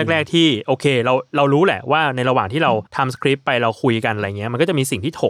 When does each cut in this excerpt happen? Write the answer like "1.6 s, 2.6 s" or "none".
2.9 s

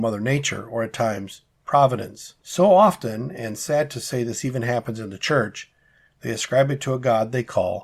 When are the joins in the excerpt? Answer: 2.4 s

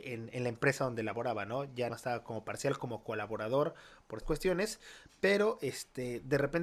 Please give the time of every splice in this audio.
1.9 s, 4.2 s

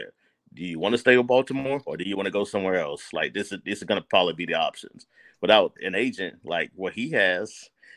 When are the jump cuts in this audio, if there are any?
none

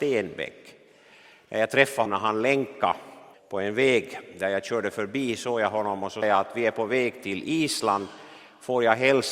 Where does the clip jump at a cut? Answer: 2.1 s, 3.3 s, 6.2 s

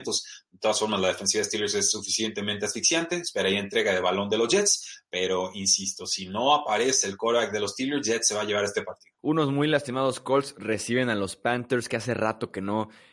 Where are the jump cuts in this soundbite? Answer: 9.2 s

